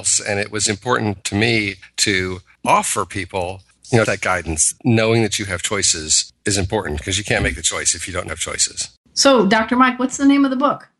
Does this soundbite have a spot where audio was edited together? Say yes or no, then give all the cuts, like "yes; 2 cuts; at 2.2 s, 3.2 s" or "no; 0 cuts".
yes; 2 cuts; at 4.1 s, 8.3 s